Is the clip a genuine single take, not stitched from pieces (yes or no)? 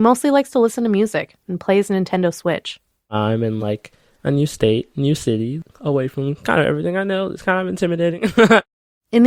yes